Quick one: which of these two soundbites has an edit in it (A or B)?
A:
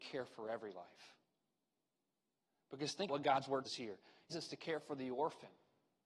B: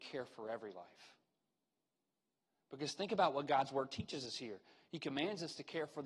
A